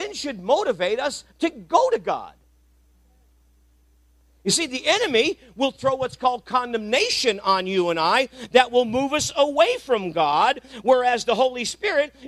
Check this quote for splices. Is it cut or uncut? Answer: uncut